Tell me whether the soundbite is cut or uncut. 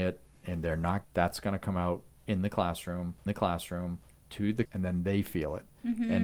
cut